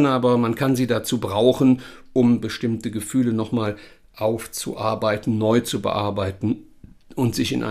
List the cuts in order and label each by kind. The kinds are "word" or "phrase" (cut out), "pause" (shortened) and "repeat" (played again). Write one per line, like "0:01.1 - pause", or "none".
none